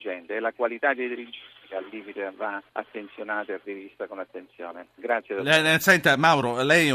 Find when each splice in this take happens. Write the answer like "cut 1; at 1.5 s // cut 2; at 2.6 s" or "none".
cut 1; at 2.7 s

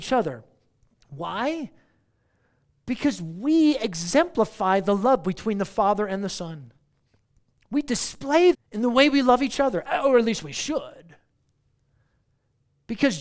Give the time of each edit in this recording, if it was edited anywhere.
cut 1; at 8.5 s

